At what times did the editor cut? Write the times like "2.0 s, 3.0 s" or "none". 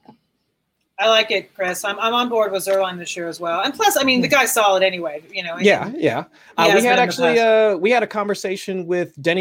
none